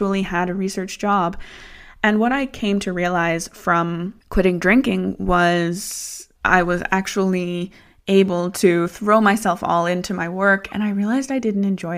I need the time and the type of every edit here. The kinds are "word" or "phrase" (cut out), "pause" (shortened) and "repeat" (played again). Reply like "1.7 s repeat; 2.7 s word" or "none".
6.3 s pause